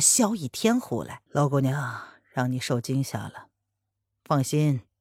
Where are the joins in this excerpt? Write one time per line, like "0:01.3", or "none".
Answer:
0:01.3